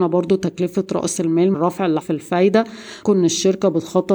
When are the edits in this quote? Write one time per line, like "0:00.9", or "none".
0:01.5
0:02.0
0:03.0